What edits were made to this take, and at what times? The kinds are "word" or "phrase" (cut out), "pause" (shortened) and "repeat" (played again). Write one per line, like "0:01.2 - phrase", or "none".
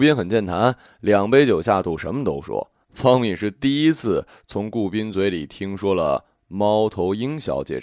0:02.8 - pause